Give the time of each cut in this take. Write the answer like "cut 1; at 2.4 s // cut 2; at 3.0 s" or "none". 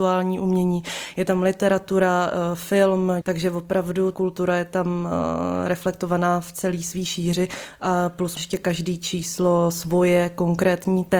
cut 1; at 3.2 s // cut 2; at 4.1 s // cut 3; at 8.4 s

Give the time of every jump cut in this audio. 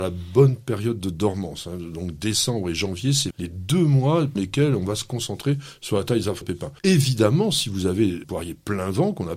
cut 1; at 3.3 s // cut 2; at 4.4 s // cut 3; at 6.4 s // cut 4; at 6.8 s // cut 5; at 8.2 s

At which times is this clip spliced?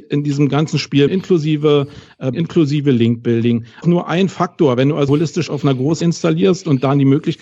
cut 1; at 1.1 s // cut 2; at 2.3 s // cut 3; at 3.8 s // cut 4; at 5.1 s // cut 5; at 5.5 s // cut 6; at 6.0 s

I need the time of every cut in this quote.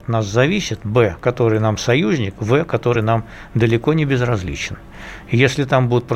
none

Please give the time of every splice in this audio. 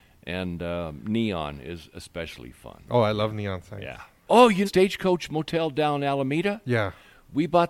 cut 1; at 4.6 s

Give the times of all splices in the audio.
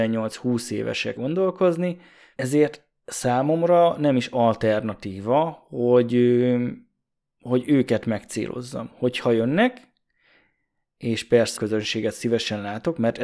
cut 1; at 1.2 s // cut 2; at 11.6 s

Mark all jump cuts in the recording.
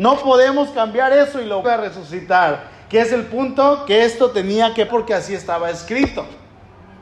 cut 1; at 1.6 s // cut 2; at 4.9 s

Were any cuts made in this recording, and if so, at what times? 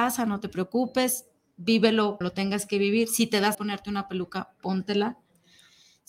cut 1; at 2.2 s // cut 2; at 3.5 s

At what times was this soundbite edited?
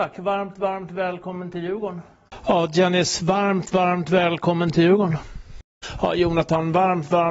none

